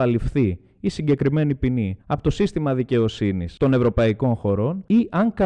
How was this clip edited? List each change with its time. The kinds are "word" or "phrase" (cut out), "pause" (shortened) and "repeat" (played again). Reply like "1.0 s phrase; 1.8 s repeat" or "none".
2.0 s pause